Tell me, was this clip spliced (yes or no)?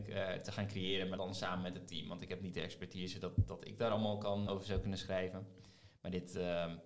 yes